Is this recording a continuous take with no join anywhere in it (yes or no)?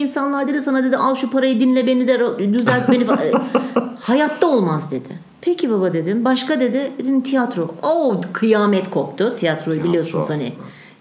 yes